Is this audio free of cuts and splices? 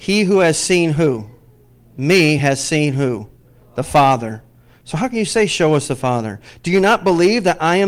yes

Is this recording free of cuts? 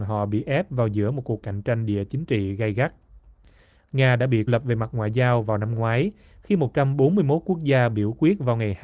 no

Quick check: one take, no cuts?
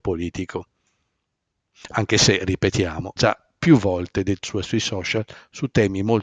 no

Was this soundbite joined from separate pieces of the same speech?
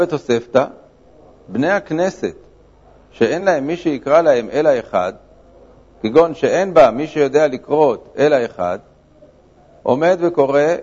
no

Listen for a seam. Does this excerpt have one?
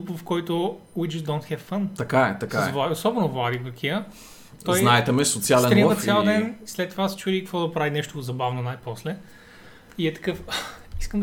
no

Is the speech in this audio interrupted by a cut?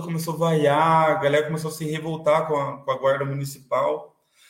no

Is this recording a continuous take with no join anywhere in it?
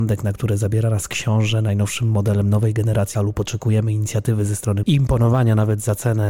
no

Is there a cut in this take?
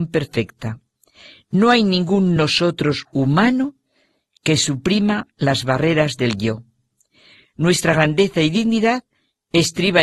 no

